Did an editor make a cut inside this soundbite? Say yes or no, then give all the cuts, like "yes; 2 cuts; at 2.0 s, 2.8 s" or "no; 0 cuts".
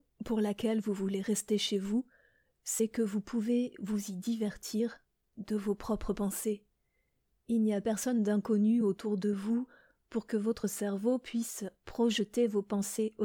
no; 0 cuts